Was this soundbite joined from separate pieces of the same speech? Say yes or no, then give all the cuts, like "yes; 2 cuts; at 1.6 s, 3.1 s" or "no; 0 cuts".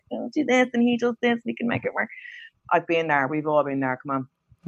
no; 0 cuts